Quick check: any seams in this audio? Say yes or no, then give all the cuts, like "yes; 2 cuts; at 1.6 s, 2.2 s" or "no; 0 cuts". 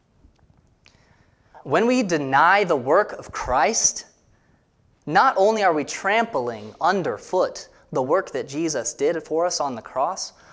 no; 0 cuts